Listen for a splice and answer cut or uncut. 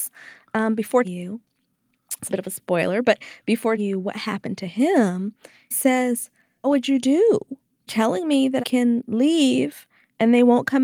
cut